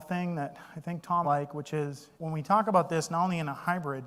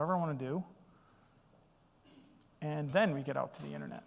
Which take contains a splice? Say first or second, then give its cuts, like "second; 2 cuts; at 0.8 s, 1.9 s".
first; 2 cuts; at 1.2 s, 2.2 s